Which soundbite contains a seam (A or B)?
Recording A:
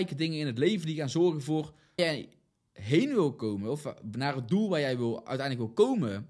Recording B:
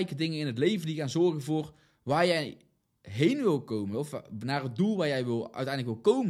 A